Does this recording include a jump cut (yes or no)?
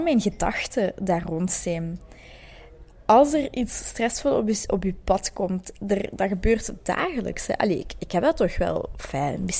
no